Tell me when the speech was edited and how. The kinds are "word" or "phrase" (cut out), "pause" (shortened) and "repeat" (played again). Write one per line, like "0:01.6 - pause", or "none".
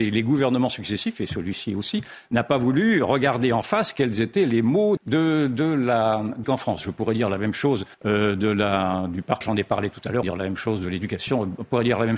0:05.0 - word
0:06.4 - phrase
0:07.9 - pause
0:09.4 - word
0:10.2 - phrase